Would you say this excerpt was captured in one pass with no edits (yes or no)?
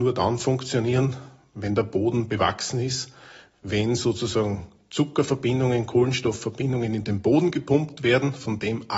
yes